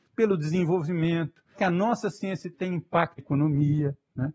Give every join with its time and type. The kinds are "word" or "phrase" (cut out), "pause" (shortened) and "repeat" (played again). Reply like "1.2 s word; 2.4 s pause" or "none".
1.5 s word; 2.5 s word; 3.2 s word